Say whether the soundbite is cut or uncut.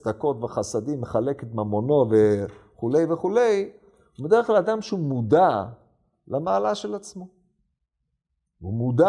uncut